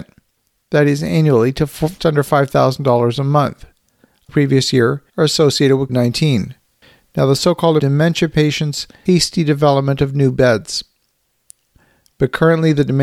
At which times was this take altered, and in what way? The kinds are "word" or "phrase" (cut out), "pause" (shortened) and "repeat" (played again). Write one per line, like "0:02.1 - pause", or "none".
0:02.0 - word
0:04.3 - phrase
0:05.1 - pause
0:05.9 - word
0:07.8 - phrase
0:09.1 - word